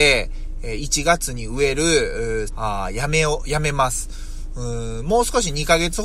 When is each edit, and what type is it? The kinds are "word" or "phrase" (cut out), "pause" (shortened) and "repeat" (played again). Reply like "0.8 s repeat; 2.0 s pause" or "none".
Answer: 2.5 s phrase